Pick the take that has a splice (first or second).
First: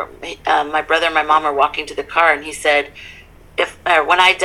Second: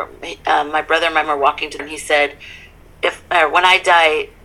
second